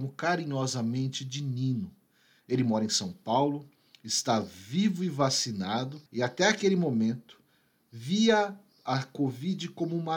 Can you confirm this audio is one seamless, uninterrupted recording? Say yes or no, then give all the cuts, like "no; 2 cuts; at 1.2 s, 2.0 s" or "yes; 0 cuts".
no; 1 cut; at 6.1 s